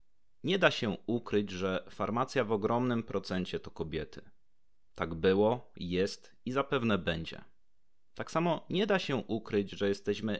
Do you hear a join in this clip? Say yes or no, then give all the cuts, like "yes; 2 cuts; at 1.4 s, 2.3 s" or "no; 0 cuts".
no; 0 cuts